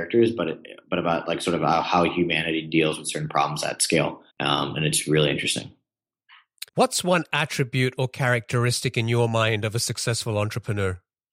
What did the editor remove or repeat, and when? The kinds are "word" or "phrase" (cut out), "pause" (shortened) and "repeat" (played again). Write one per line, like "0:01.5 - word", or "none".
0:04.3 - pause
0:06.7 - pause